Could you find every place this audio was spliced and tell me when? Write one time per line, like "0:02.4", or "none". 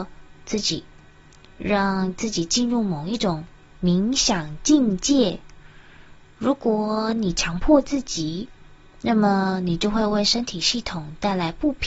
none